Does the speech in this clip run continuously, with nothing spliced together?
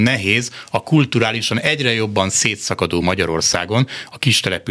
yes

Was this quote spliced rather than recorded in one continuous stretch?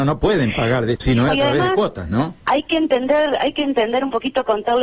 yes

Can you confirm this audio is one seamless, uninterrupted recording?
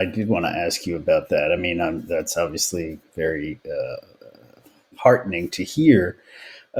yes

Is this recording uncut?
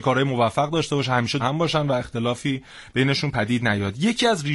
no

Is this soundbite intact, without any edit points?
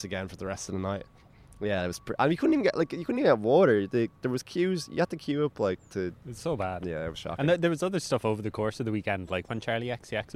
yes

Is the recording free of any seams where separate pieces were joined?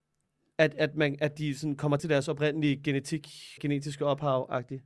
no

